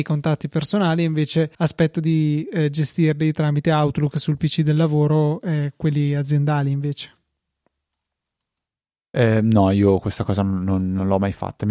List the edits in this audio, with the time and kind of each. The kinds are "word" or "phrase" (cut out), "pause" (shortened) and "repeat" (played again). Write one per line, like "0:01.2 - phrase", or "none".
0:01.5 - pause